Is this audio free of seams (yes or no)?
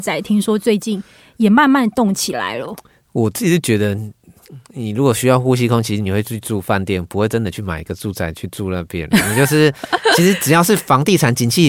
yes